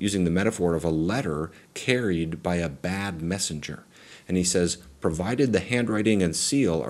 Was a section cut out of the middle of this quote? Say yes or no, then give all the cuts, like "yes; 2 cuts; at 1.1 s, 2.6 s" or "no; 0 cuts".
no; 0 cuts